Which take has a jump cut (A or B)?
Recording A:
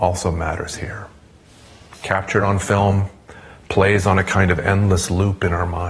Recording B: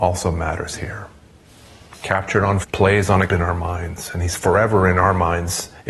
B